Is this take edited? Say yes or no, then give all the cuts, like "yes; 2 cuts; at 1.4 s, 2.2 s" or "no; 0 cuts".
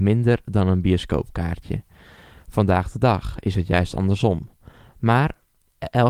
no; 0 cuts